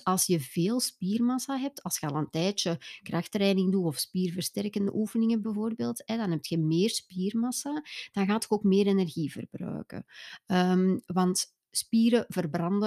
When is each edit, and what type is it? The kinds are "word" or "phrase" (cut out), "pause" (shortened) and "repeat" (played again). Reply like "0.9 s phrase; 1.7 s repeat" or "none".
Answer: none

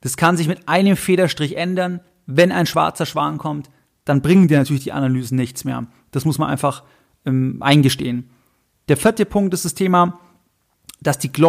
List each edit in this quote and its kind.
none

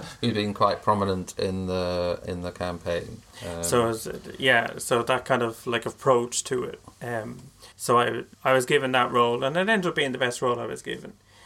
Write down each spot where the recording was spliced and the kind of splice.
7.7 s pause; 8.3 s pause

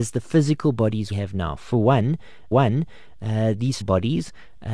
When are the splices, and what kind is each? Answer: 1.1 s word; 2.5 s repeat; 3.8 s word

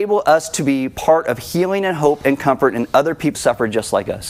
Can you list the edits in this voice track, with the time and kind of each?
3.3 s word

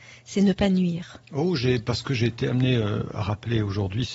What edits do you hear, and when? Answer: 1.2 s pause

